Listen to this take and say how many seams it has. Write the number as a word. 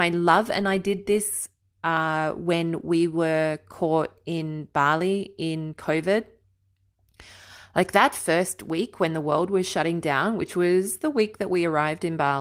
zero